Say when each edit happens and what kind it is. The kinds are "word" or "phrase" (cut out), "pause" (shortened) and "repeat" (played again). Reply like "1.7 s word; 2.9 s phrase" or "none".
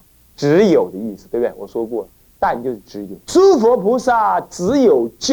3.2 s pause

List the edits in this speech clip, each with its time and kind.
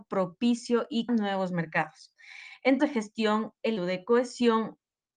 1.1 s word; 2.8 s word; 3.8 s word

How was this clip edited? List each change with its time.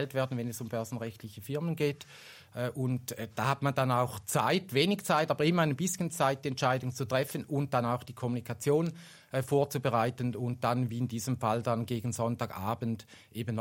none

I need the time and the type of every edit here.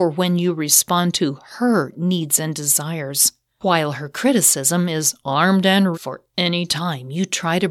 5.9 s word

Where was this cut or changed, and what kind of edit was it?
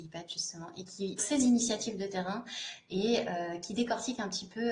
1.2 s phrase

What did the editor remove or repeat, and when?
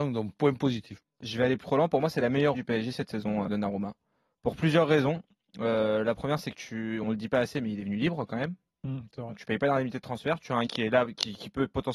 1.0 s word; 1.6 s word; 2.5 s word; 3.5 s word; 7.0 s word; 10.7 s word

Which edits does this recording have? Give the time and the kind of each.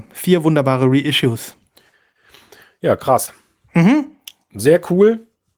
none

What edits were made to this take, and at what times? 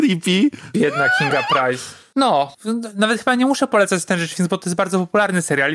none

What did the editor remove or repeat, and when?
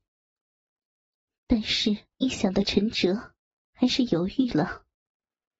2.1 s pause; 3.7 s phrase

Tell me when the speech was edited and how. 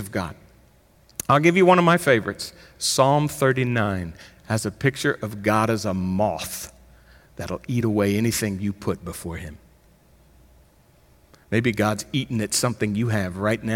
none

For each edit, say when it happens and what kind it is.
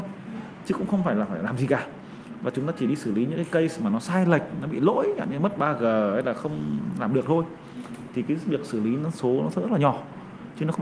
none

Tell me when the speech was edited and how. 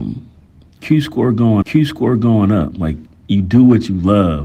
1.6 s repeat

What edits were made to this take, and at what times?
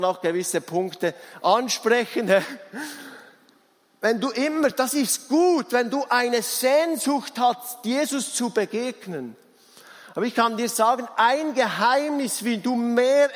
none

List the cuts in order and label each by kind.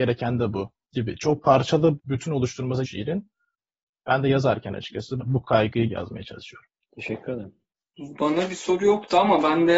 0.9 s word; 2.0 s word; 2.8 s word; 5.2 s word; 5.9 s word

